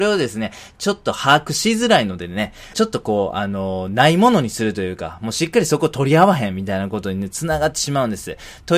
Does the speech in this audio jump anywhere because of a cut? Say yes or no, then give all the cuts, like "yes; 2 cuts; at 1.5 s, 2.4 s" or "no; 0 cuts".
yes; 1 cut; at 2.7 s